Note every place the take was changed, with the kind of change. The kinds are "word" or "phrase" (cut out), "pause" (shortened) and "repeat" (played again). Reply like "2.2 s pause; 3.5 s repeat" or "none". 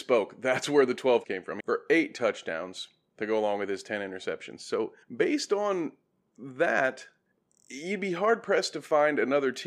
1.2 s word; 1.6 s phrase; 5.0 s pause; 7.3 s pause